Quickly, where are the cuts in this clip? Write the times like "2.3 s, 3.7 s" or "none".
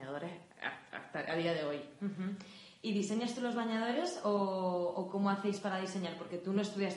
none